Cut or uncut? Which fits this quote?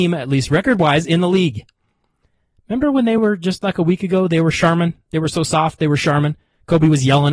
uncut